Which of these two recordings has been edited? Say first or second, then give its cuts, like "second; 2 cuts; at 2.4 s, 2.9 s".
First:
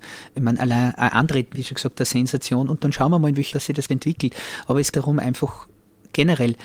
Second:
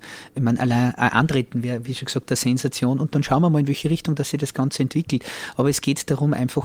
first; 4 cuts; at 1.5 s, 3.5 s, 3.9 s, 4.9 s